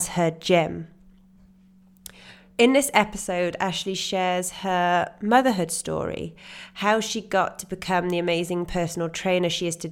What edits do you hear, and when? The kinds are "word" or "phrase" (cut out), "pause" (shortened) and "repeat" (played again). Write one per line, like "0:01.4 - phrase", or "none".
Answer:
none

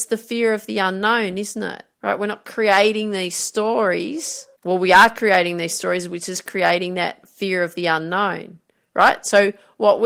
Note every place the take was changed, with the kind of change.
0:01.9 - pause
0:04.6 - pause

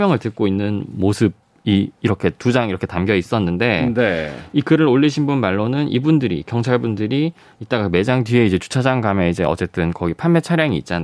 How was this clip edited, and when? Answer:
none

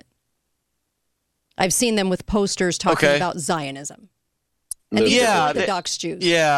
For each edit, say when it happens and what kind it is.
none

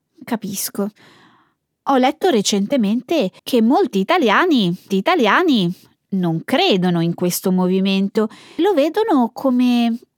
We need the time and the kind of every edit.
0:03.4 - pause
0:04.9 - repeat
0:08.6 - word

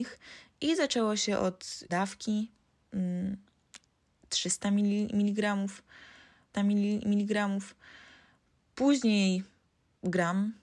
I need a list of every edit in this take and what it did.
0:01.9 - phrase
0:06.5 - repeat

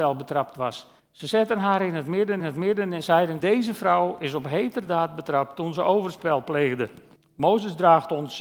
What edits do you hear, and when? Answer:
0:01.0 - pause
0:02.4 - repeat
0:03.4 - phrase
0:07.2 - pause

